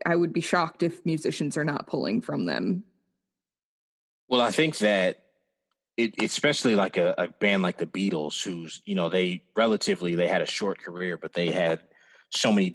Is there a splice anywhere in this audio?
no; 0 cuts

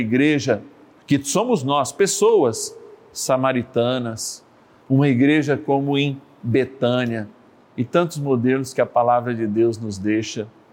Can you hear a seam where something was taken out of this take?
no; 0 cuts

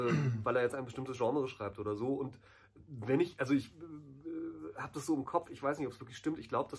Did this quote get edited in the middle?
no; 0 cuts

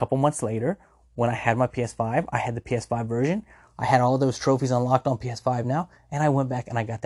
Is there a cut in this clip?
no; 0 cuts

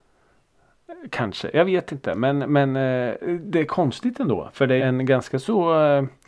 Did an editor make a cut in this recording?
yes; 1 cut; at 4.8 s

